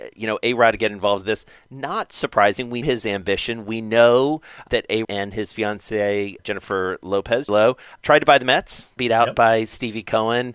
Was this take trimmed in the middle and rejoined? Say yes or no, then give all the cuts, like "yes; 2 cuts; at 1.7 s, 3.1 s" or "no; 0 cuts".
yes; 7 cuts; at 2.8 s, 4.7 s, 5.0 s, 6.4 s, 7.5 s, 8.0 s, 9.0 s